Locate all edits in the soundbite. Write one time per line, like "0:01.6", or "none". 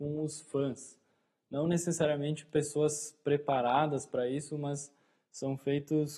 none